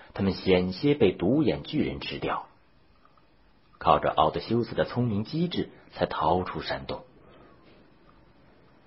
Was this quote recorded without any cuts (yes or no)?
yes